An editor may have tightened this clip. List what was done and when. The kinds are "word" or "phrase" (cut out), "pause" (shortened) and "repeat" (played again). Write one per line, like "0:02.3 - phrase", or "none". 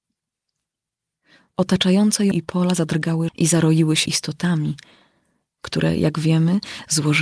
0:02.3 - word
0:03.3 - word
0:04.1 - word